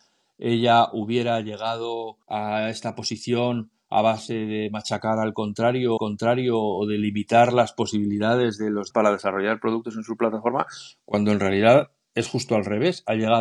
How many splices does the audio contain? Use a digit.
3